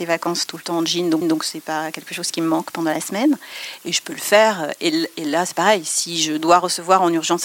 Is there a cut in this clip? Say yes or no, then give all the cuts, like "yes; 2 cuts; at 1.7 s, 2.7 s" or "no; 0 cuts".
yes; 1 cut; at 1.2 s